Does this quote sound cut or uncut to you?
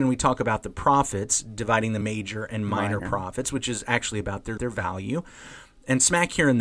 cut